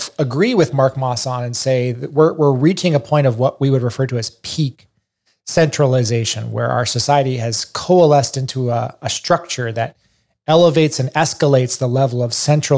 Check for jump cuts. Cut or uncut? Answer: uncut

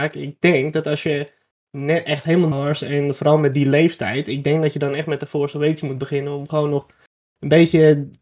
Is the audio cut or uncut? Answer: cut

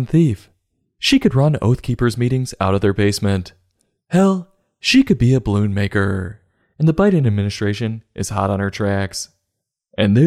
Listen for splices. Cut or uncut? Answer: uncut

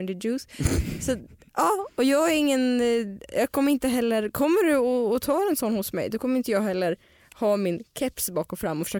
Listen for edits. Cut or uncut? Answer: uncut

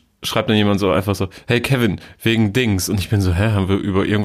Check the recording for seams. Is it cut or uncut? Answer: uncut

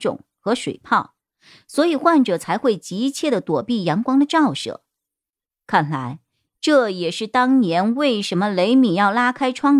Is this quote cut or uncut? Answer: uncut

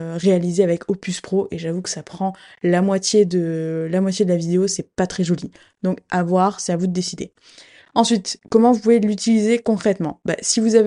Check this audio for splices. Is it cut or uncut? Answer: uncut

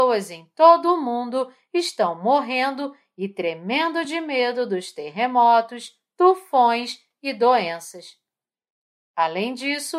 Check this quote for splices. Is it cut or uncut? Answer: uncut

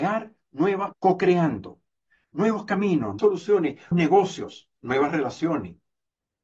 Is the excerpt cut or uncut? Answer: cut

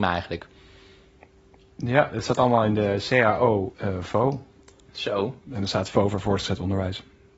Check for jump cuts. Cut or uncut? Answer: cut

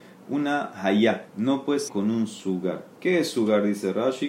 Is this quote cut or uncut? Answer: cut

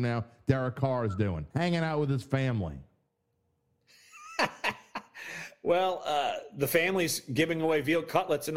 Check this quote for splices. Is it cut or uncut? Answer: cut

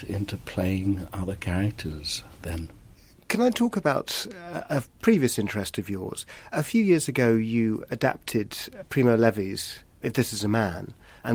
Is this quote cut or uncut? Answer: uncut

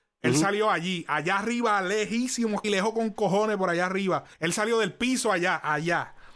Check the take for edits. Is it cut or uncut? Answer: cut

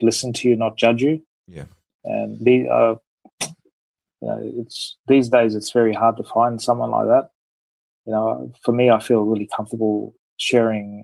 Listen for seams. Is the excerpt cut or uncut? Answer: uncut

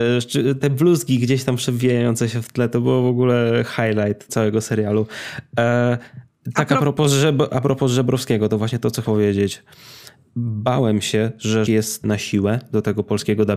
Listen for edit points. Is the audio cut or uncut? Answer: cut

